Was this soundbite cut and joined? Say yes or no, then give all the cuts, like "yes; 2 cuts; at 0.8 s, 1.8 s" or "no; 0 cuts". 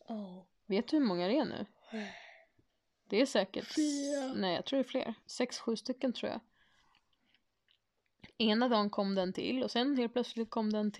yes; 1 cut; at 5.2 s